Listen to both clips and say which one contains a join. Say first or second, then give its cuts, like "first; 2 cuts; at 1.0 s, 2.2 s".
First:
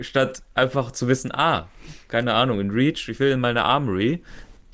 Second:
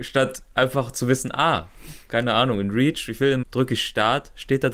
second; 1 cut; at 3.4 s